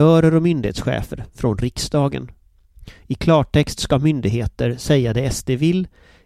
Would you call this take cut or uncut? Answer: uncut